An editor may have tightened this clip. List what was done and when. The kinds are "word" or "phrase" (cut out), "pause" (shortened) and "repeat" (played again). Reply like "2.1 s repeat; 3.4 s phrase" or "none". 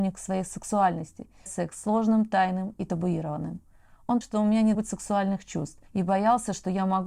1.5 s word; 4.2 s word; 4.7 s word; 5.9 s pause

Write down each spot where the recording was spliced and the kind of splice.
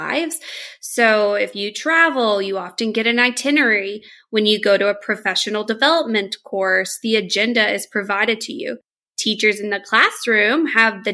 none

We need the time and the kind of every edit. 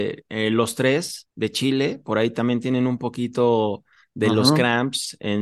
none

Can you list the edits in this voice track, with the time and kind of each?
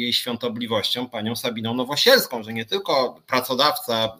none

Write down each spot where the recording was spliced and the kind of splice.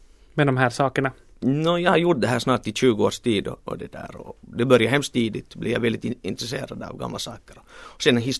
none

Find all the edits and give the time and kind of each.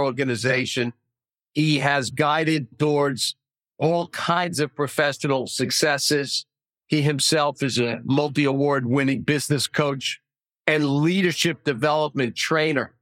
2.7 s word

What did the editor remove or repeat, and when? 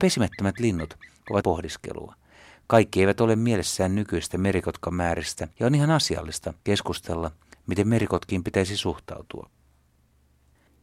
1.4 s phrase; 5.5 s pause; 6.6 s pause

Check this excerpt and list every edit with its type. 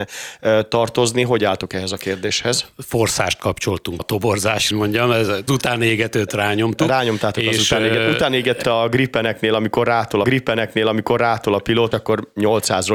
4.0 s word; 4.7 s phrase; 5.5 s phrase; 8.6 s phrase; 10.2 s repeat; 11.9 s word

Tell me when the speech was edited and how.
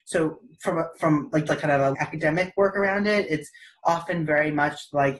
1.5 s word; 1.9 s phrase

